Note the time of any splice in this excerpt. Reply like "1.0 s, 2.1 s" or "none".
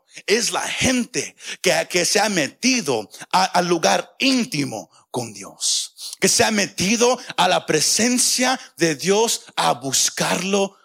none